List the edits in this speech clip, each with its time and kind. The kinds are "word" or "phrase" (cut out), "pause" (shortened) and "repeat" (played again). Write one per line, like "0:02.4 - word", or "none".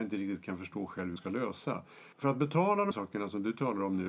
0:01.2 - word
0:02.1 - pause
0:02.9 - word